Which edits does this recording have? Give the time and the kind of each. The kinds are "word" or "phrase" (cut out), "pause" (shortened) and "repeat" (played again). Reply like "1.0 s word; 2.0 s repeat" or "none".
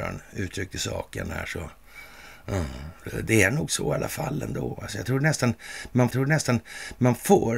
6.1 s repeat